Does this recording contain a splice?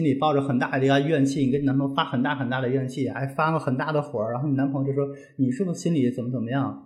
no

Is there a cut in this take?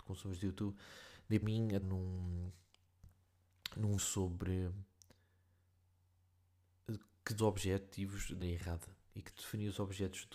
yes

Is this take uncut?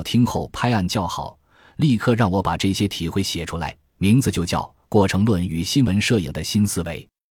yes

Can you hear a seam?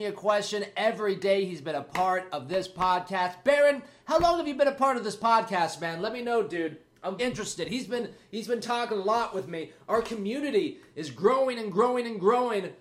yes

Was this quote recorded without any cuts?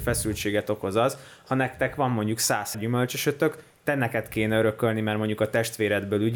no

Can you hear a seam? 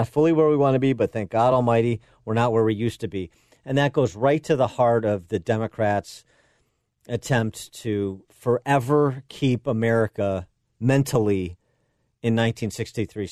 no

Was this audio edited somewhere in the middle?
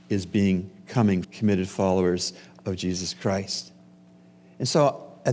yes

